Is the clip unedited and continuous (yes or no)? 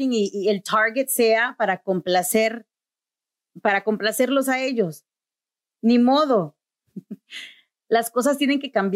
yes